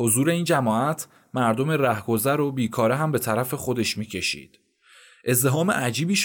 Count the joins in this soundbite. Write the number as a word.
zero